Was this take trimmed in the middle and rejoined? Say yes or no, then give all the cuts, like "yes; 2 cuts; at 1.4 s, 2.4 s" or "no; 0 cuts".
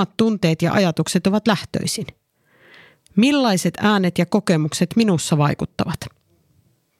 no; 0 cuts